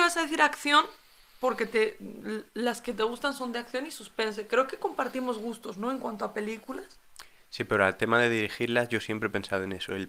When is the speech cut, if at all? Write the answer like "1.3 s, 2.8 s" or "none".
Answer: none